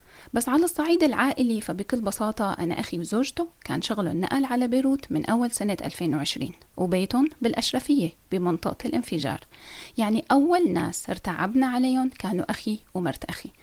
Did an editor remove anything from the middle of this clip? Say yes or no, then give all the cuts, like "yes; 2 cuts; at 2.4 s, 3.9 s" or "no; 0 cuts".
no; 0 cuts